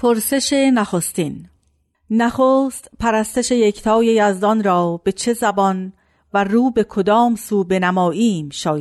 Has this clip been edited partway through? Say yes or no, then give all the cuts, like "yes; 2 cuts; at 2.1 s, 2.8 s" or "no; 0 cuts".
no; 0 cuts